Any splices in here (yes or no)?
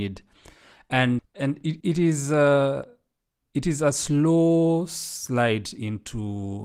yes